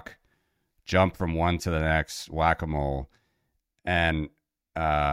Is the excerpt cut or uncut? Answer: cut